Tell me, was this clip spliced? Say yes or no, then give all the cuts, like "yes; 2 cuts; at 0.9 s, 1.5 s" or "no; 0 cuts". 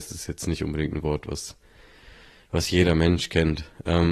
no; 0 cuts